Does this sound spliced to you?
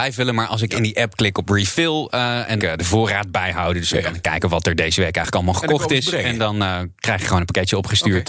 yes; 1 cut; at 2.6 s

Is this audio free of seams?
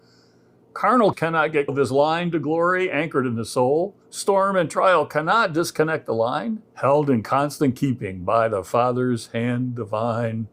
no; 4 cuts; at 1.1 s, 1.7 s, 4.0 s, 6.7 s

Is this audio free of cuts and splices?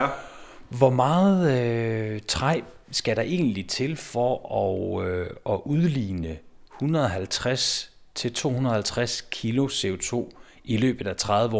yes; 0 cuts

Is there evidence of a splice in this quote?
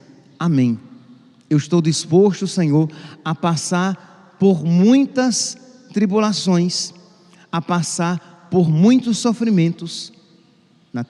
no; 0 cuts

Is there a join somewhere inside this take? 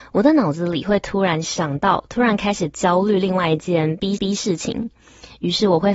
yes; 1 cut; at 4.2 s

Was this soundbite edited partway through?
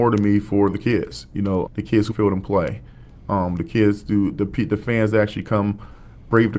yes; 2 cuts; at 1.7 s, 2.1 s

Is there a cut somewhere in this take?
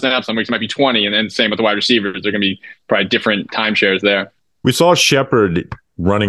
no; 0 cuts

